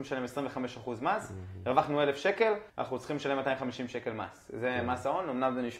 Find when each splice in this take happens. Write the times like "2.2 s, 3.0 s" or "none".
2.7 s